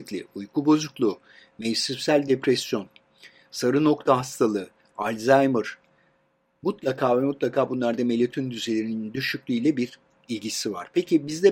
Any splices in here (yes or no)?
no